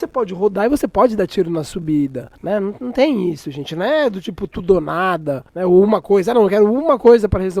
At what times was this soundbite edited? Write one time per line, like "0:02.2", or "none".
0:02.4
0:05.5